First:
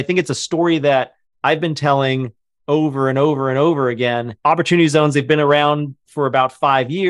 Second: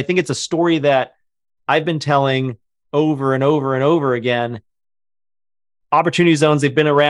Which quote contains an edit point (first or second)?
first